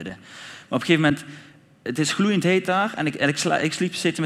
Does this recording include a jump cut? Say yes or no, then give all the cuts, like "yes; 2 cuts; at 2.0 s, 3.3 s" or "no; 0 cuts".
no; 0 cuts